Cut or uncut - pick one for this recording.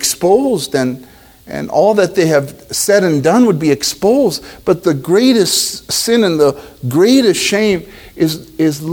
uncut